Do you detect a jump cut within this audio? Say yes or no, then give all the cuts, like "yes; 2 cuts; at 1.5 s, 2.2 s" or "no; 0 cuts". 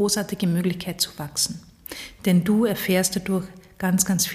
no; 0 cuts